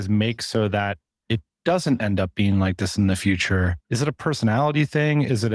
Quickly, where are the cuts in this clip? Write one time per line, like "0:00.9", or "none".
0:03.8

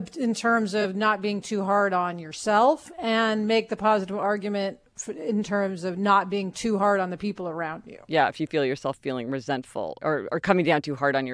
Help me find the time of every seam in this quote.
none

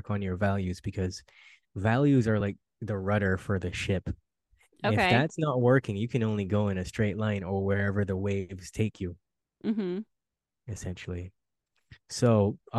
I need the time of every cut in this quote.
none

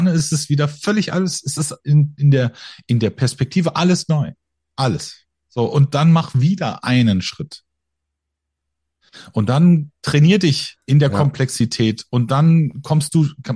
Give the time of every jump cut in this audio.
0:10.8

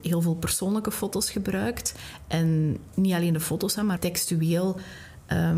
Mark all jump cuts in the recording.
0:04.0

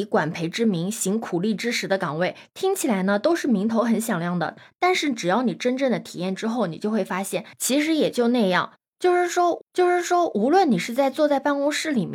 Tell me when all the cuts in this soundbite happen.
0:09.6

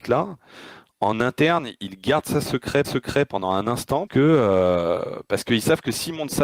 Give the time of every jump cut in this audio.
0:02.8
0:04.1

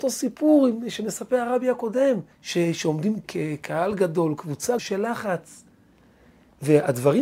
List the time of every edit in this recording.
0:02.3
0:03.2
0:04.8

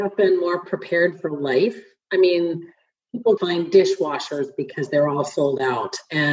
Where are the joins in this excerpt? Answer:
0:03.4

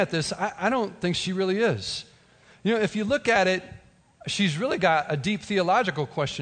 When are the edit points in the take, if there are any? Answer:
none

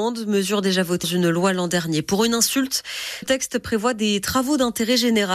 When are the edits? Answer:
0:01.0
0:03.2

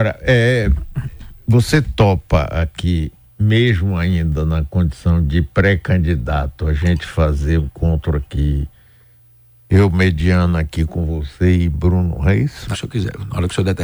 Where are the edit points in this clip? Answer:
0:07.6
0:12.7

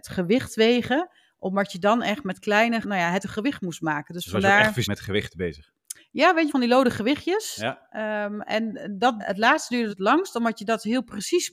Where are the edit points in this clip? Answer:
0:02.8
0:03.2
0:04.8
0:06.5
0:09.2
0:09.9

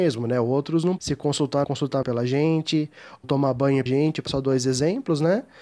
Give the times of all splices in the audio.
0:01.0
0:01.6
0:02.0
0:03.2
0:03.9
0:04.3

